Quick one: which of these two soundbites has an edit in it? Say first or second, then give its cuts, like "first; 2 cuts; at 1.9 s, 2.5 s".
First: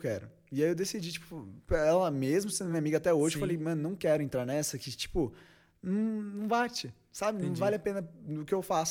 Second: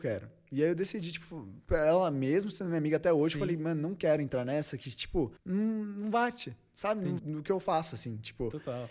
second; 2 cuts; at 5.4 s, 7.2 s